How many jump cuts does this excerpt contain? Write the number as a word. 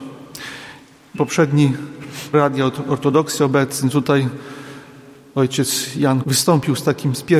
three